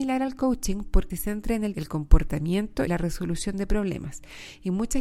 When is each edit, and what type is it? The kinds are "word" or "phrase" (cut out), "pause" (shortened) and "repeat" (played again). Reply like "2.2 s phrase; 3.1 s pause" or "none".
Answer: 1.1 s word; 1.7 s word; 2.9 s word